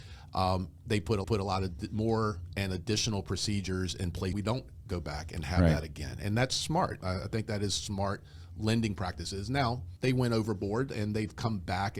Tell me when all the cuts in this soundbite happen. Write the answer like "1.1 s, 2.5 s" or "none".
1.2 s, 4.3 s, 10.0 s